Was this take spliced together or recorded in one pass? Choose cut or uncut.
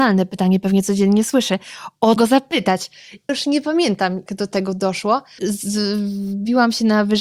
cut